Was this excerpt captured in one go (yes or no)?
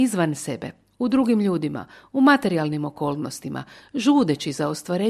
yes